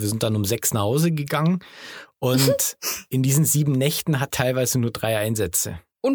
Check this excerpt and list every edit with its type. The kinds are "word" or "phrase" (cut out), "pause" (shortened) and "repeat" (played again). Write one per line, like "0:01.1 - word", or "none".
0:04.3 - word